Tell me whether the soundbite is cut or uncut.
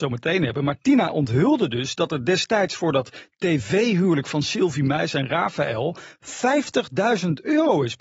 uncut